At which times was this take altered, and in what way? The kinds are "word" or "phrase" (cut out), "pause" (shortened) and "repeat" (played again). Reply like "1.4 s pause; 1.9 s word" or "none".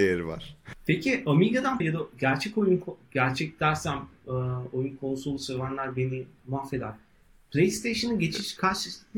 1.8 s word